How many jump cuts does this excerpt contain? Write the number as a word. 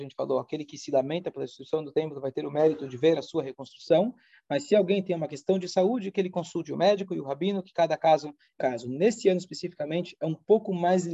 one